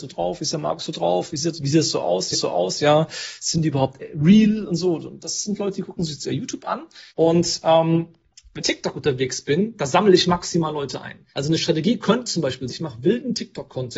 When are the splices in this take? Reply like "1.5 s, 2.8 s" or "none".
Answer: 2.3 s, 7.1 s, 8.6 s, 11.3 s, 12.7 s